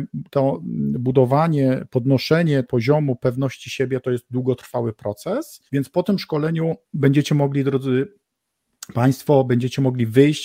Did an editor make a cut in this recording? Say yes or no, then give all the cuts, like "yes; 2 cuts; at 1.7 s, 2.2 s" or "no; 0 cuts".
yes; 3 cuts; at 2.6 s, 5.7 s, 6.8 s